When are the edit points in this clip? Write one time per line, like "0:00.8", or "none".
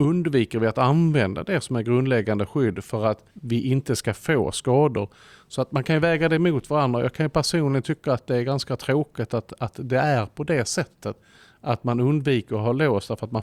0:03.3